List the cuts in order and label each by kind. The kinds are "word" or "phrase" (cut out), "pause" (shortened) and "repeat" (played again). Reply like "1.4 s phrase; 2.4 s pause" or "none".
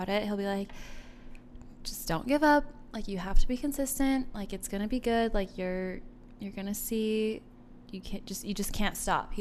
none